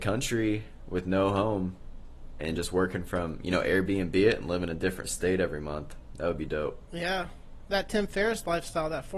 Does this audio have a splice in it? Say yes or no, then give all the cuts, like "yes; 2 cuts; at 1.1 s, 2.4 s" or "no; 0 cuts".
no; 0 cuts